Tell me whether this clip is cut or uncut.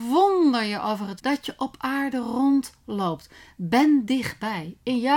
cut